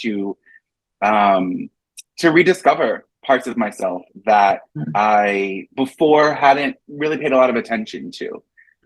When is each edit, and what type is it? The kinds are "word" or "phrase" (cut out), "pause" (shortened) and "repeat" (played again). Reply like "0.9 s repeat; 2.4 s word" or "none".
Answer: 4.7 s pause